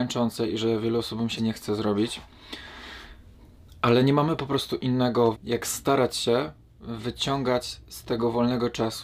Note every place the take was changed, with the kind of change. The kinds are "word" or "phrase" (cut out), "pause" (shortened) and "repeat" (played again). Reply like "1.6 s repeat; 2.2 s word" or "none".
1.4 s word; 5.3 s word